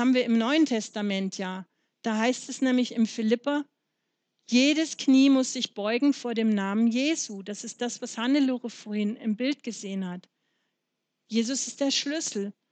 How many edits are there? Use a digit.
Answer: 0